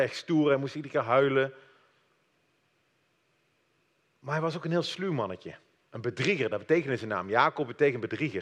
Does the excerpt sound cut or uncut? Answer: uncut